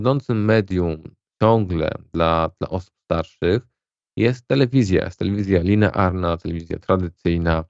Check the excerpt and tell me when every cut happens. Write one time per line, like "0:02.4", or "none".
none